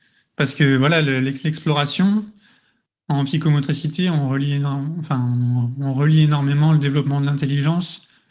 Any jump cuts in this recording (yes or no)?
no